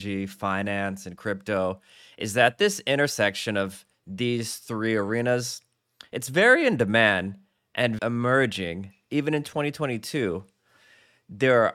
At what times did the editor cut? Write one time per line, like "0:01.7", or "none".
0:08.0